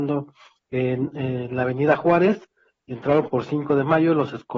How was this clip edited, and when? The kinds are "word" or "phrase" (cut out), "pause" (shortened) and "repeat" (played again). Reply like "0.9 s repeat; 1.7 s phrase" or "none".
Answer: none

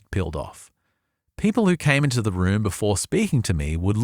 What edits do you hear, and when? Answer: none

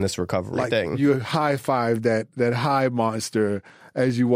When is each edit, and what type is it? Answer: none

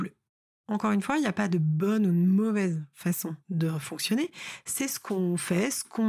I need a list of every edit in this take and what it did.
3.4 s pause

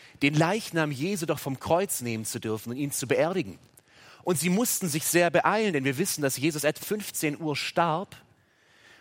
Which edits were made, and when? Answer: 6.8 s word

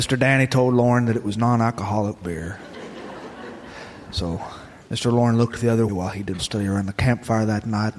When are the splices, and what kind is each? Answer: 4.8 s pause; 5.9 s word; 6.4 s word

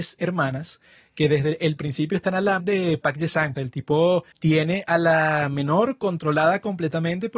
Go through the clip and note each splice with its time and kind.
2.6 s word; 3.6 s phrase; 4.3 s pause

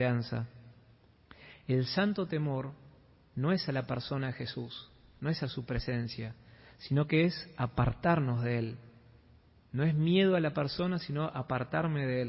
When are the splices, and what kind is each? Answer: none

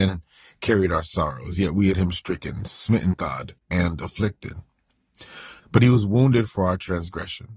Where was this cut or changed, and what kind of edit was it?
1.9 s word; 3.1 s word; 3.6 s pause; 5.6 s pause

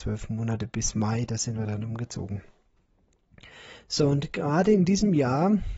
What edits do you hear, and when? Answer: none

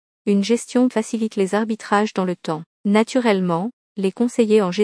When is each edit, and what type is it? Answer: 0.9 s word; 2.7 s pause

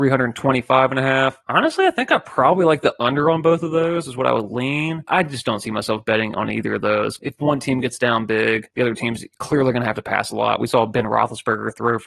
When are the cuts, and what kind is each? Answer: none

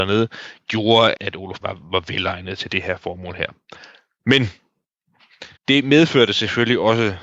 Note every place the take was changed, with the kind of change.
1.1 s word; 1.6 s phrase; 5.6 s pause

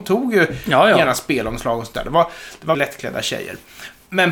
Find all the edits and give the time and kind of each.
2.7 s word

